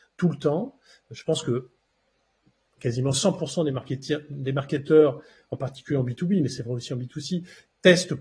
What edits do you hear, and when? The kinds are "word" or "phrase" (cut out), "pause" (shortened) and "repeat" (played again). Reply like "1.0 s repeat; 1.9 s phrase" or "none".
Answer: none